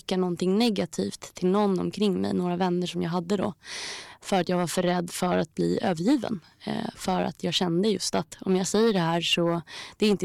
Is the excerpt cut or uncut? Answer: uncut